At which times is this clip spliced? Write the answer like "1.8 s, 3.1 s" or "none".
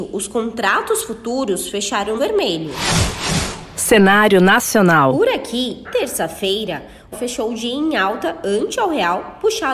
2.2 s, 5.8 s, 7.1 s